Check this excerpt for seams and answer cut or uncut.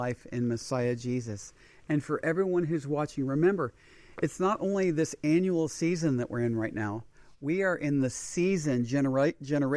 uncut